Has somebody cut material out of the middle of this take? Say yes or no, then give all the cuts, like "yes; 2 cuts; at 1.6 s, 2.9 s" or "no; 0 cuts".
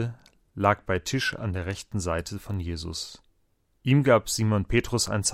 no; 0 cuts